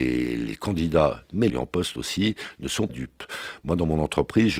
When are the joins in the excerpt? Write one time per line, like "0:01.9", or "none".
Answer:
0:01.5
0:02.9